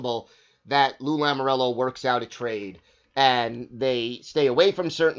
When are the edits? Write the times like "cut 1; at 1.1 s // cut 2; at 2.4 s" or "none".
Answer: none